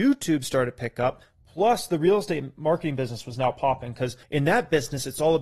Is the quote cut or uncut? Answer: cut